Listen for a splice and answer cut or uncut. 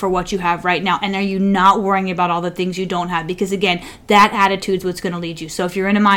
uncut